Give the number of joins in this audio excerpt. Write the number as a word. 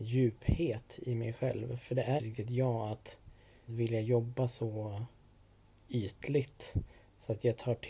two